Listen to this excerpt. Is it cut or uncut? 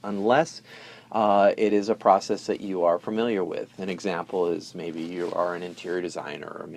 uncut